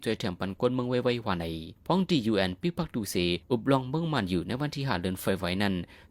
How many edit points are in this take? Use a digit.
2